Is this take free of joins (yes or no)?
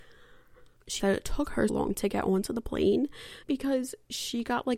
no